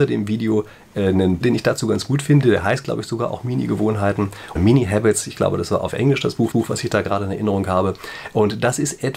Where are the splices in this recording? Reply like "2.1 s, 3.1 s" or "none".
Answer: 1.4 s, 4.6 s, 6.5 s